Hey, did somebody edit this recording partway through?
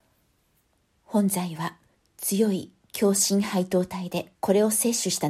yes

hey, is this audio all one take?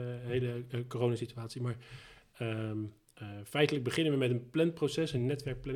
yes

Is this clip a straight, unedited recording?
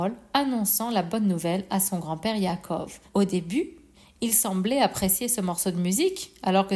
no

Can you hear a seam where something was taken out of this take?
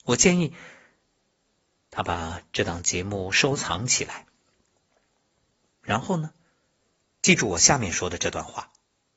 yes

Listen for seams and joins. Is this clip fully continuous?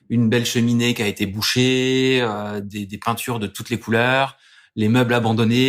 yes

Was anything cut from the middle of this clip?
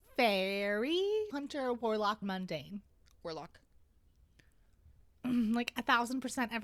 yes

